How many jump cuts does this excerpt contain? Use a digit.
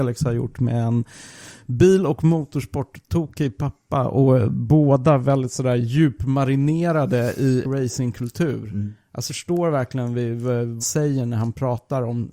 3